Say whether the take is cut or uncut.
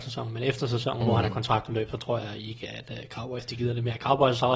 uncut